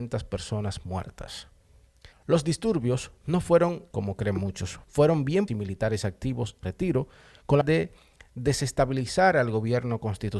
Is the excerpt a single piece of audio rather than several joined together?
no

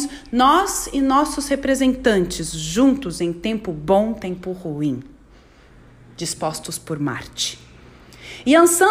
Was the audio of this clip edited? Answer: no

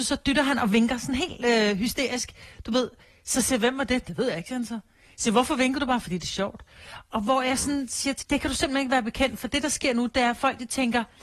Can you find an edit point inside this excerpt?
yes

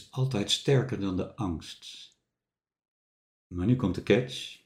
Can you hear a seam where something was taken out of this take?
no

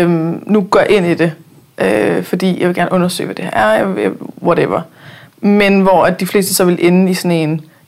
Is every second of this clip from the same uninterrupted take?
yes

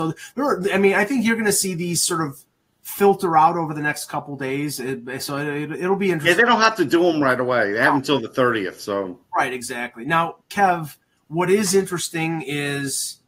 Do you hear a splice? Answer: no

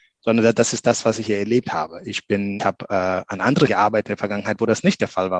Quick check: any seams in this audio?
yes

